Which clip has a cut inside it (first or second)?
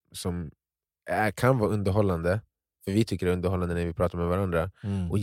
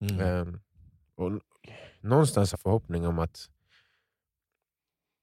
second